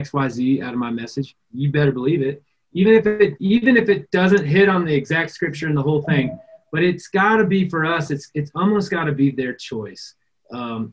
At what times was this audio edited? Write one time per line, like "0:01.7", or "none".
none